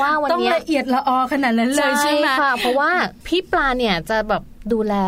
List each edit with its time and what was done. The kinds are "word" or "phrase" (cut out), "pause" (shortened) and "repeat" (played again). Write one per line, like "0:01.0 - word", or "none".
0:03.2 - pause